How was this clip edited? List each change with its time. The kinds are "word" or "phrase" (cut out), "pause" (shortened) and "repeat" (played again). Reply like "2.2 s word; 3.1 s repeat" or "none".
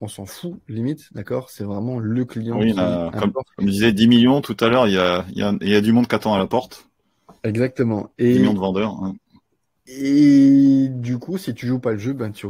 3.5 s pause; 7.4 s pause; 9.4 s pause